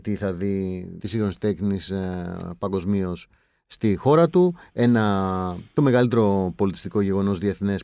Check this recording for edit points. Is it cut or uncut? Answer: cut